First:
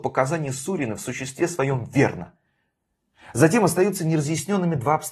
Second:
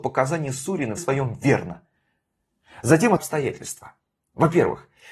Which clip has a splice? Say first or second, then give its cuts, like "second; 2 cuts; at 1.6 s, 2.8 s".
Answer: second; 2 cuts; at 1.0 s, 3.2 s